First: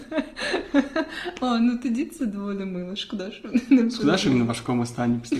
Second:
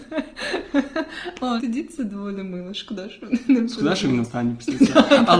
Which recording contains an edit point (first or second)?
second